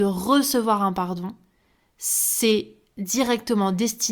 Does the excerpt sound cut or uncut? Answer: uncut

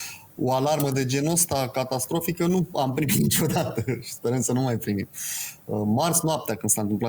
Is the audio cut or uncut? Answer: uncut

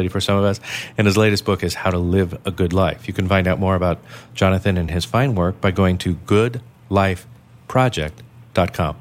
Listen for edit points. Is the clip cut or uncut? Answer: uncut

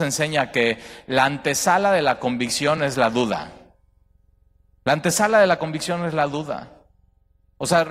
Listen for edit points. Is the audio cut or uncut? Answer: uncut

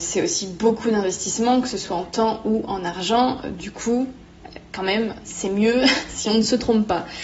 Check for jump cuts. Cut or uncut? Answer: uncut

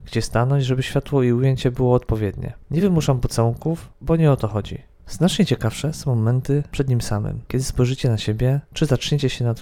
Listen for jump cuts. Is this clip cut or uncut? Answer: uncut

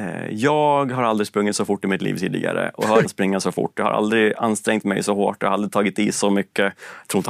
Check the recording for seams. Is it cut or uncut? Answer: cut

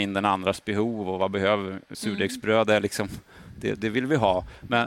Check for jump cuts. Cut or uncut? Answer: cut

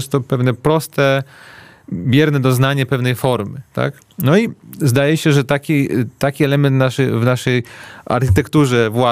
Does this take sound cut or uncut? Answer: uncut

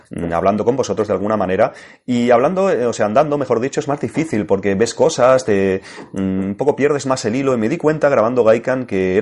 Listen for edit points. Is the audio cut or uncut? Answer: uncut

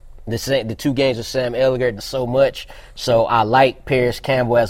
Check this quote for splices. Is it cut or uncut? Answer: cut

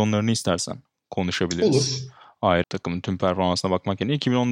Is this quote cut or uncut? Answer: cut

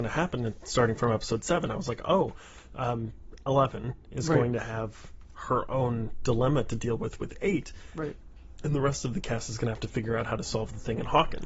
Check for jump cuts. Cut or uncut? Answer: uncut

